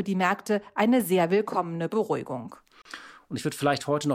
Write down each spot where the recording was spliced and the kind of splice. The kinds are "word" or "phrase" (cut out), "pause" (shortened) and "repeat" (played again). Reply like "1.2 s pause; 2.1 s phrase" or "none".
none